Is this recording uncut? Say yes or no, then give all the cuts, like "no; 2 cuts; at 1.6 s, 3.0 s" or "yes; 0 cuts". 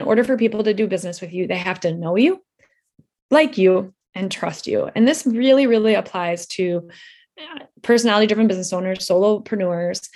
yes; 0 cuts